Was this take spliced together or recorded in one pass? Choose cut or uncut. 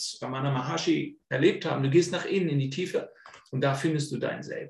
uncut